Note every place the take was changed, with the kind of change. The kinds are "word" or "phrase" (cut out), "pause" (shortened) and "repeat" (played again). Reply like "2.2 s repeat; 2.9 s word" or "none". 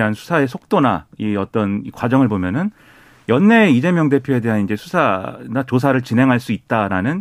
none